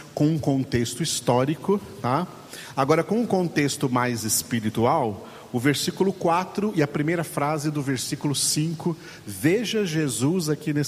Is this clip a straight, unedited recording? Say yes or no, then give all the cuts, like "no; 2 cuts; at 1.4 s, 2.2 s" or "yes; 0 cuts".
yes; 0 cuts